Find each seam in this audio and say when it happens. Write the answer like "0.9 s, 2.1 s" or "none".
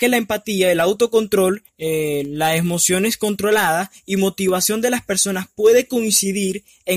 1.7 s